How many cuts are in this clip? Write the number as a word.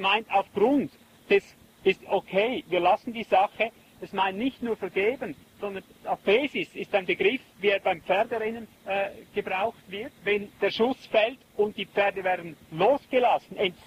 two